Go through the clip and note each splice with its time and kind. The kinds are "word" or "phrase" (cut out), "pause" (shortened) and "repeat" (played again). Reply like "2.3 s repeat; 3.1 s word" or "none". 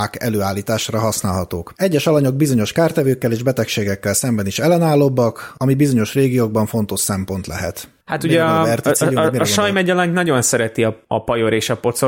none